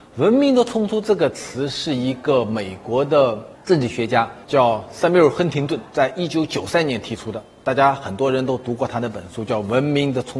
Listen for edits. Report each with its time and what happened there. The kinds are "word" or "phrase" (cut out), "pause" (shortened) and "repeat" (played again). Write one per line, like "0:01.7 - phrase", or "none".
0:04.4 - pause
0:05.9 - pause